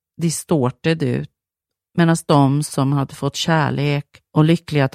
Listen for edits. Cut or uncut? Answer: uncut